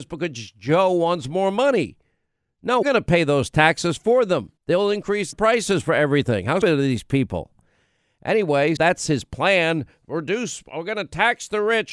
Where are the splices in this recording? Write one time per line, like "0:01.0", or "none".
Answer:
0:02.8
0:04.6
0:05.3
0:06.6
0:08.8